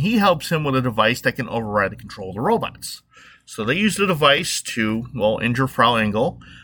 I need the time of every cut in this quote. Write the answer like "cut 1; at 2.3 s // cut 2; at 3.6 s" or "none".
none